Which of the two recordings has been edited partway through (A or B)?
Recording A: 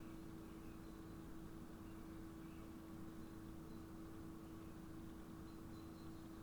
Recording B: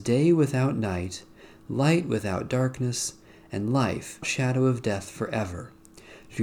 B